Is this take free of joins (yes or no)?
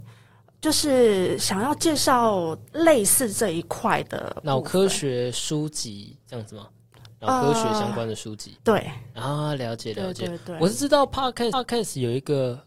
no